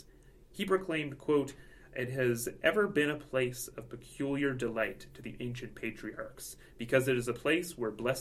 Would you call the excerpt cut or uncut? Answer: uncut